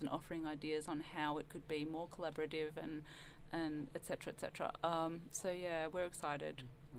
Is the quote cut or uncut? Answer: uncut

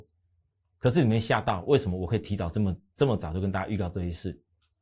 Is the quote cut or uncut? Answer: uncut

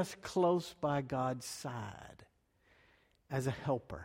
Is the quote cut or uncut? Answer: uncut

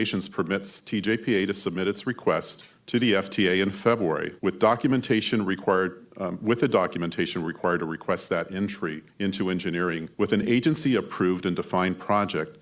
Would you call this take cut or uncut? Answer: cut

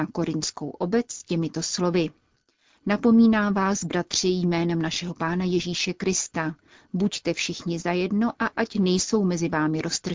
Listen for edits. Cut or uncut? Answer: uncut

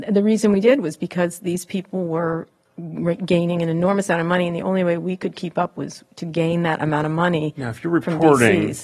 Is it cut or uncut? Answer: uncut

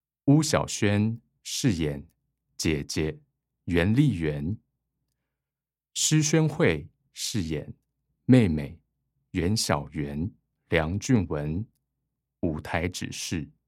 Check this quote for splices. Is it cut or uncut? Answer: cut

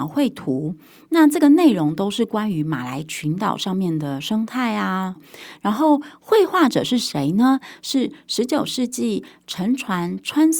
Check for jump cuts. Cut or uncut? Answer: cut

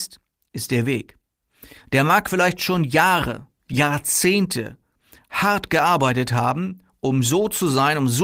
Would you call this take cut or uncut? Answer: uncut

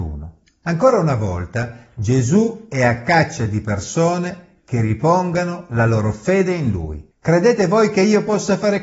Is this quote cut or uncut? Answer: cut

